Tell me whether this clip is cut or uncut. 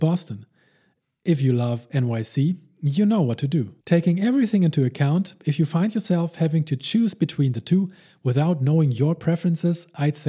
cut